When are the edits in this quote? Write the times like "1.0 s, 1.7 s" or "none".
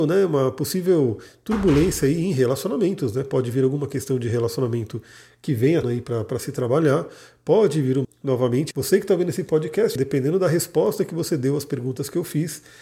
5.8 s, 8.0 s, 8.7 s, 10.0 s